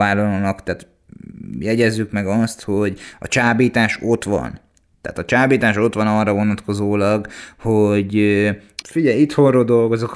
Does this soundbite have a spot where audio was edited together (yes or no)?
yes